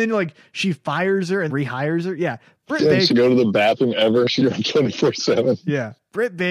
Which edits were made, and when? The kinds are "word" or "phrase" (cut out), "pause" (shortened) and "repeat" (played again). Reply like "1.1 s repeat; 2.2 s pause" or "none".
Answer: 1.5 s word; 3.1 s word; 4.4 s word